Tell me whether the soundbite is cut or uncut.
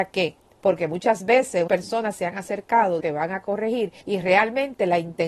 cut